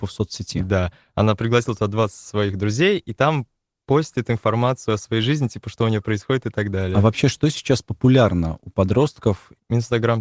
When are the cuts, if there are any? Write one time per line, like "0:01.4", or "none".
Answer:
none

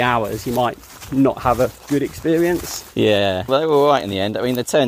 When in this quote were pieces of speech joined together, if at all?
0:03.5

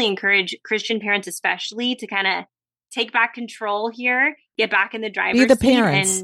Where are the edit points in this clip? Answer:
none

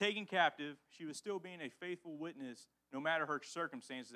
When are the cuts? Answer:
none

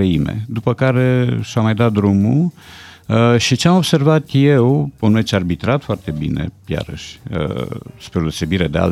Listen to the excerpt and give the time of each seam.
none

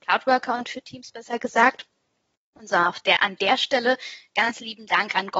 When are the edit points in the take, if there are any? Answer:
none

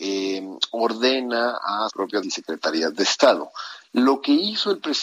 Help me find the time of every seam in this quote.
0:01.9
0:02.2

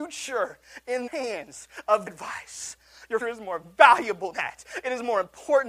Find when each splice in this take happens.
0:01.1
0:02.1
0:03.2
0:04.3

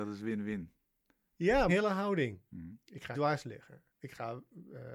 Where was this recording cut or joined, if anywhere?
0:01.7
0:03.1
0:03.9

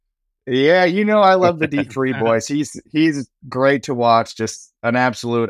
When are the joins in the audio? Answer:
none

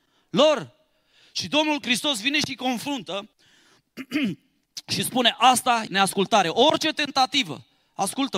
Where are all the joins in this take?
0:05.9

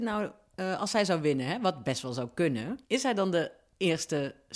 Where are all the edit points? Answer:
0:02.8

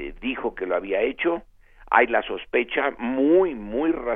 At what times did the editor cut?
none

